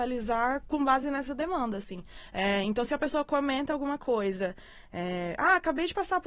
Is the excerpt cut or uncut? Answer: uncut